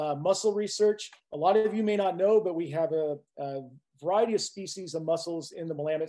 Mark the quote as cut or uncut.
cut